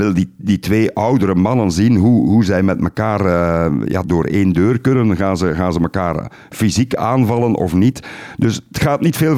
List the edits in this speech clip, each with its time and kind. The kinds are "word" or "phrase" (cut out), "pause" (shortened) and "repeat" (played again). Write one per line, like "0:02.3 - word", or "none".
0:04.0 - word